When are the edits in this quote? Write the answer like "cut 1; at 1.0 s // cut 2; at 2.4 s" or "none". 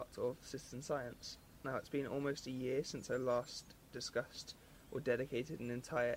none